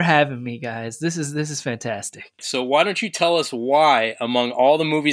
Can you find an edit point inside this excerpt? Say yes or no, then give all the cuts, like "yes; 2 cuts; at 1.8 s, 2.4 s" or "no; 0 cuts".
no; 0 cuts